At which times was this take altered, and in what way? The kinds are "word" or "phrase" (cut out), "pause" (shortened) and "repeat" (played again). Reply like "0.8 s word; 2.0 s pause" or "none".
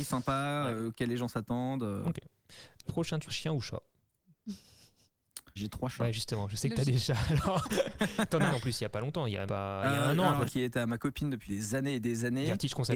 2.8 s word; 3.3 s word; 5.6 s phrase; 8.5 s word; 9.5 s word; 10.5 s phrase; 11.5 s word